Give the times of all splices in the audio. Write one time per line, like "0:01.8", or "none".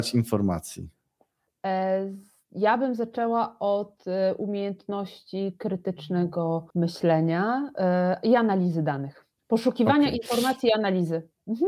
0:06.7
0:09.4